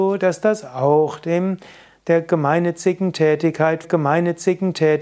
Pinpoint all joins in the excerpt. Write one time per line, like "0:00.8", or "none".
0:03.8